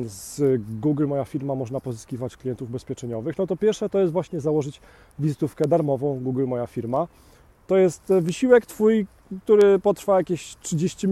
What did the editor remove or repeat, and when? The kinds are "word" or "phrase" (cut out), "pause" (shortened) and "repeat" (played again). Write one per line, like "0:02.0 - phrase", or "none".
none